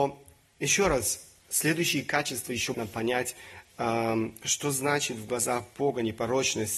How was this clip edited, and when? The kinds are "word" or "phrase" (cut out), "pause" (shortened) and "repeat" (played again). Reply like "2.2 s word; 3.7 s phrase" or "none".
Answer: 1.4 s pause; 2.7 s phrase